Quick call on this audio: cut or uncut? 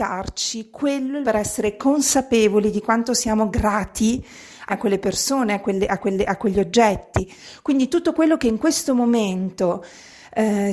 cut